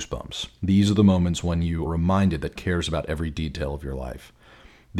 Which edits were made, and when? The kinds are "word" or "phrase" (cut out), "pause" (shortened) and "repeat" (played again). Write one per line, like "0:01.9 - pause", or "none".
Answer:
0:01.9 - word
0:02.6 - word